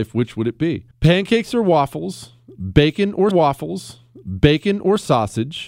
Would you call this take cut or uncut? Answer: cut